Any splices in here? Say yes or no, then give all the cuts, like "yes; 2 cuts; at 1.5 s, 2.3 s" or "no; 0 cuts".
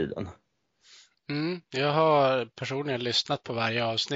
no; 0 cuts